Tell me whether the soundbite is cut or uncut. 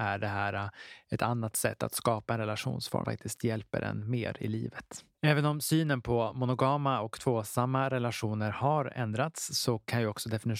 cut